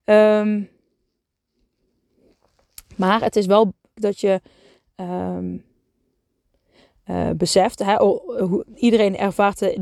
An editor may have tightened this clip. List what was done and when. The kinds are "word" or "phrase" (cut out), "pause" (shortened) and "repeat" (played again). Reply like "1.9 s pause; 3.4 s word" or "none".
4.0 s word